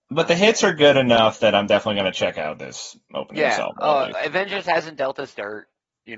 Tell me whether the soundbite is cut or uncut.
uncut